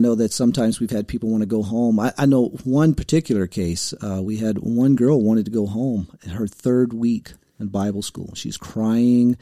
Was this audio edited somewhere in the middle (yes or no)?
no